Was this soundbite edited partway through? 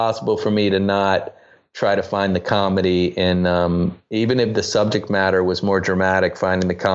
no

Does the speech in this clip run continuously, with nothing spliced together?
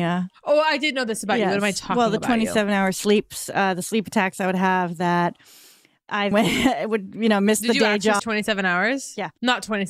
no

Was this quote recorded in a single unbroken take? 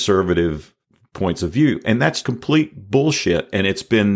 no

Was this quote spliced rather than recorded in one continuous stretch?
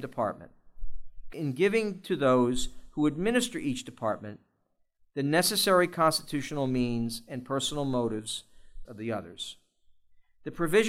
yes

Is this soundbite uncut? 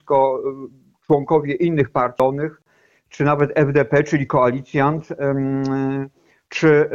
yes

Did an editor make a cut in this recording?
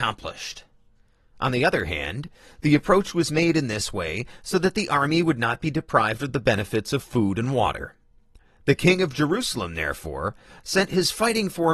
no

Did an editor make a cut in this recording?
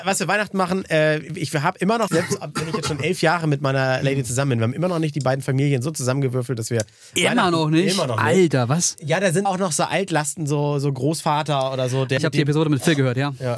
yes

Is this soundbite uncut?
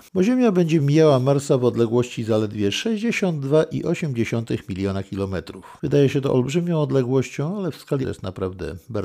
no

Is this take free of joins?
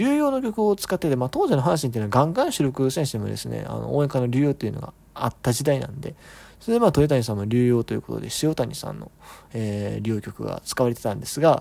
yes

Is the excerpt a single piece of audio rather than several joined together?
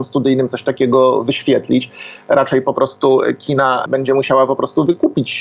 yes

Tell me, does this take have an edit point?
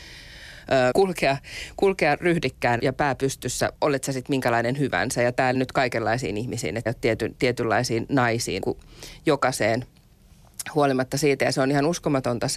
yes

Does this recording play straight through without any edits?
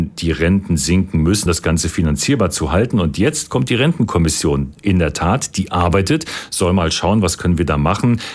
no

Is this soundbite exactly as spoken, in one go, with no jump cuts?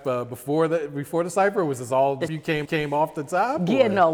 no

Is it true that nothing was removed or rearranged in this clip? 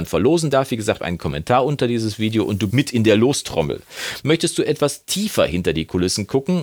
no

